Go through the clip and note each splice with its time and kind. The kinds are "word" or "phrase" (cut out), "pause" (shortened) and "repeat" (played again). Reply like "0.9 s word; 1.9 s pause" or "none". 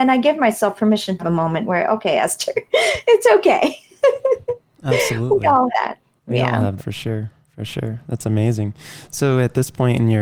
1.2 s word; 5.7 s word; 6.8 s word